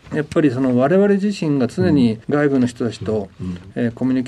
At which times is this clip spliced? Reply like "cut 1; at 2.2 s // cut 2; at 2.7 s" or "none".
cut 1; at 2.2 s